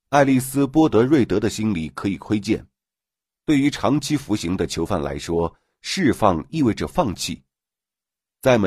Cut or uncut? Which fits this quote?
uncut